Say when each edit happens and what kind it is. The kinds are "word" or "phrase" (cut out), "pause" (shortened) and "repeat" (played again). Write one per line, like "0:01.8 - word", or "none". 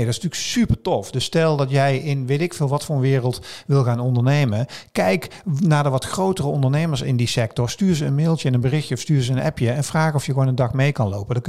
none